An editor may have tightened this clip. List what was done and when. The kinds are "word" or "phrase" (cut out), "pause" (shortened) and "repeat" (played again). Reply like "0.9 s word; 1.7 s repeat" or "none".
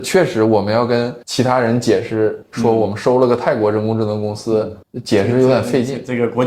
1.2 s pause; 4.8 s pause